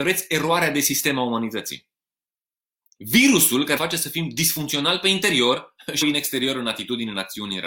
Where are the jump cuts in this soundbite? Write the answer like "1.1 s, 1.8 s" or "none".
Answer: 3.8 s, 6.0 s

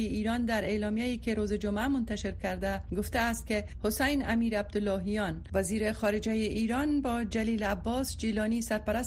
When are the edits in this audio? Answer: none

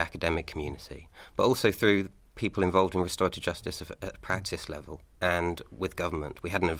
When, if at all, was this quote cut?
none

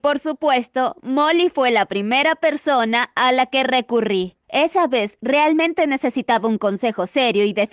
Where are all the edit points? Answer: 4.4 s

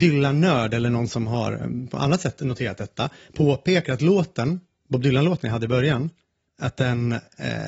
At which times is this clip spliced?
none

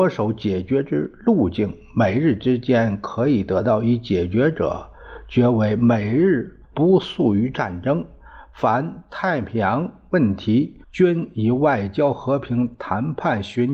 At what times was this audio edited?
6.6 s, 10.8 s

